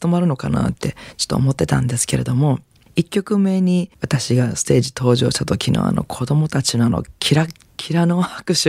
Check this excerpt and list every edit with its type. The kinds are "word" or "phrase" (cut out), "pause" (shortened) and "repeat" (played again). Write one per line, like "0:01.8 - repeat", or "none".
0:03.9 - pause